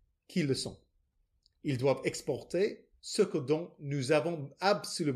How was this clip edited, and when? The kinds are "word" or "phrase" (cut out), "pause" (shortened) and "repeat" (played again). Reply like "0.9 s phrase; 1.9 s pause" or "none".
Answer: 3.0 s pause